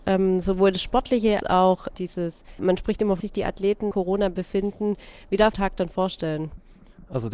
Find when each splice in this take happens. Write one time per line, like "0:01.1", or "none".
0:01.4
0:02.6
0:03.2
0:03.9
0:05.5